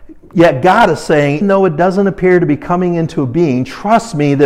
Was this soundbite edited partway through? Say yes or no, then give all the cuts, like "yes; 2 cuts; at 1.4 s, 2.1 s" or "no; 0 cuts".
yes; 1 cut; at 1.4 s